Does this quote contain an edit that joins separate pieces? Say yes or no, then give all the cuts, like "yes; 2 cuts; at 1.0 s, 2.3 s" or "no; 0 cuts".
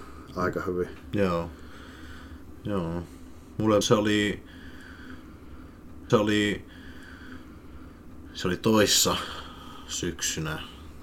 yes; 2 cuts; at 3.8 s, 6.1 s